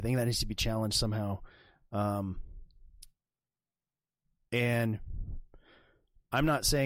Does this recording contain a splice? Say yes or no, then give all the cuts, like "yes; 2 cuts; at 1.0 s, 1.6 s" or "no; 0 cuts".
no; 0 cuts